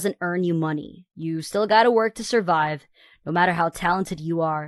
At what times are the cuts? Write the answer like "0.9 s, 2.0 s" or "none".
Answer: none